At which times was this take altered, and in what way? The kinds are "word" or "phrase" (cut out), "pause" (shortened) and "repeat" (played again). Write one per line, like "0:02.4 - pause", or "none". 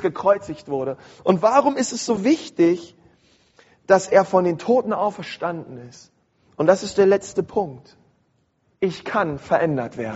none